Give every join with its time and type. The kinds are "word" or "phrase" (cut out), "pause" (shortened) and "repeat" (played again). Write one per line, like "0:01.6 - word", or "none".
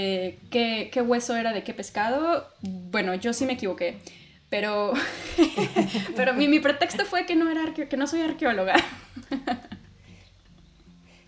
none